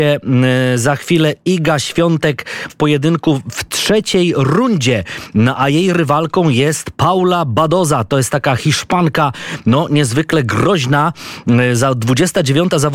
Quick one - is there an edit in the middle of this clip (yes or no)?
yes